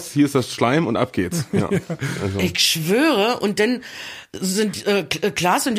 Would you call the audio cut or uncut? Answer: uncut